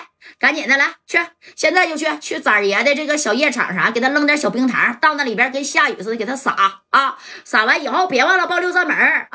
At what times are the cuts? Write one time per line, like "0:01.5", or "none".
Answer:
none